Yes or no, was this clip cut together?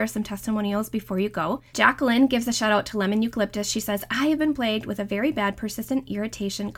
yes